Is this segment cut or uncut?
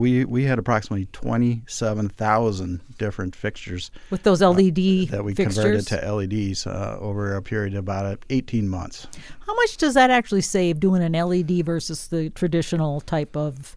uncut